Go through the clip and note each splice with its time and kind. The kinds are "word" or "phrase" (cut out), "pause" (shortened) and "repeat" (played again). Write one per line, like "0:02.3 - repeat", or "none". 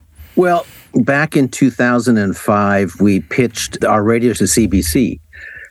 0:03.8 - word
0:04.3 - word